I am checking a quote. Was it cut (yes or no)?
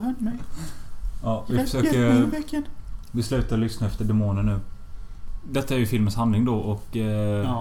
no